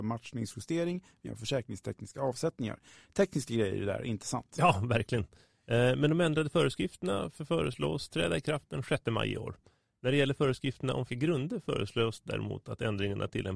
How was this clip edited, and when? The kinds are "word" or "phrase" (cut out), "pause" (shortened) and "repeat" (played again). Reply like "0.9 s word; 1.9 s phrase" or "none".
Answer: 1.2 s word; 11.1 s word

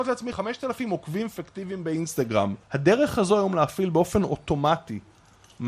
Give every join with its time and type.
none

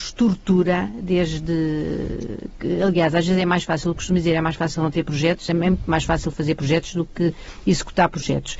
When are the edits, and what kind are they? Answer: none

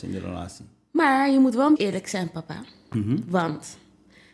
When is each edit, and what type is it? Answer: 1.8 s word

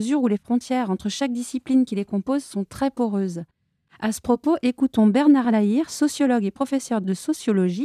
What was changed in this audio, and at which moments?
none

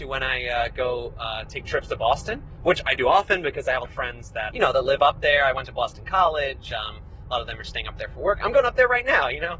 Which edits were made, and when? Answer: 3.8 s word; 4.5 s word

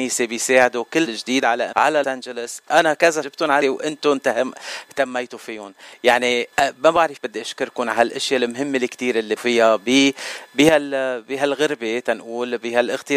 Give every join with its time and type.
1.1 s phrase; 1.7 s word; 2.0 s word; 3.2 s word; 3.6 s word; 6.5 s pause; 7.2 s word; 9.4 s word

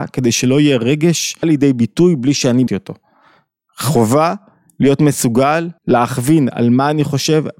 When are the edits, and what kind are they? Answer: 1.4 s word; 2.7 s word; 5.8 s pause

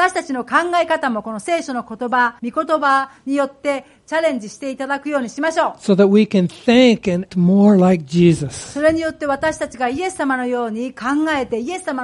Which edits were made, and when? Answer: 2.4 s pause; 7.3 s word

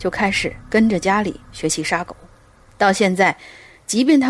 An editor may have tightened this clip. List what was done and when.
none

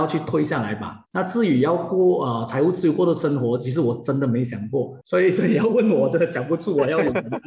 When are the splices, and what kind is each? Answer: 1.1 s pause; 5.0 s pause

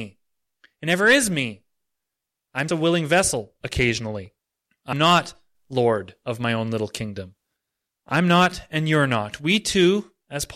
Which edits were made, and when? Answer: 2.7 s word; 4.9 s word

